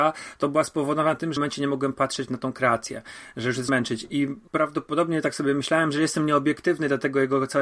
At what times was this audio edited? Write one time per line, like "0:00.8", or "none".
0:01.4
0:03.7
0:04.5